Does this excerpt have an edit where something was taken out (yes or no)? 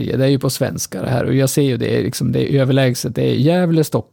no